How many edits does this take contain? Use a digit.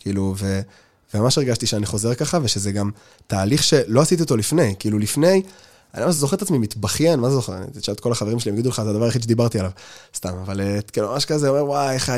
0